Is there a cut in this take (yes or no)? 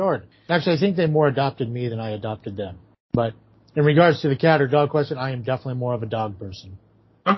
no